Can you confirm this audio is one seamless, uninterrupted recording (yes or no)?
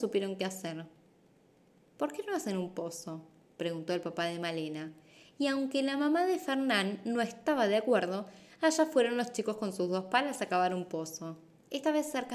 yes